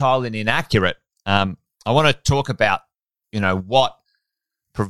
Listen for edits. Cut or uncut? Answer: uncut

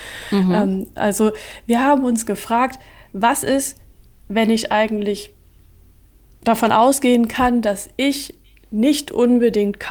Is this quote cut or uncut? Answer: uncut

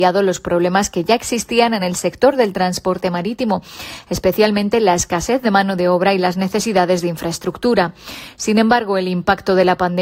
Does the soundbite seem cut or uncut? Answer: uncut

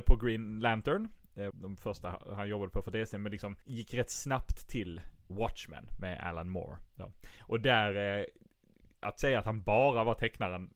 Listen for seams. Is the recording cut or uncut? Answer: cut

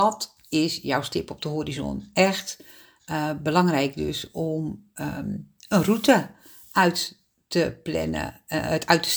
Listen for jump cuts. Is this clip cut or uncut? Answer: uncut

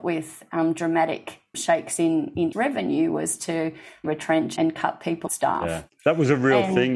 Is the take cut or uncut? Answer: cut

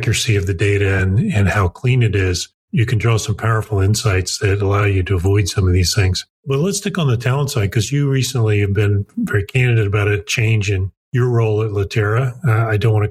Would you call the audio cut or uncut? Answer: uncut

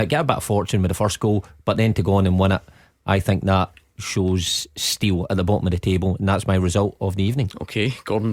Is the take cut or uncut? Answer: uncut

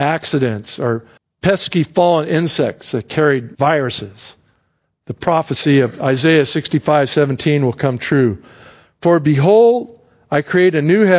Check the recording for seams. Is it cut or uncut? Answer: cut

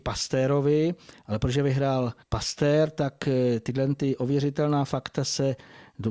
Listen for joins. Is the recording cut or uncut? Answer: cut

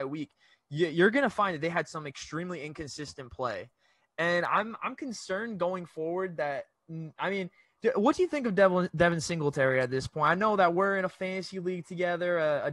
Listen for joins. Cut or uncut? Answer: uncut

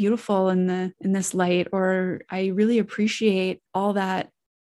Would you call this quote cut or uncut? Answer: cut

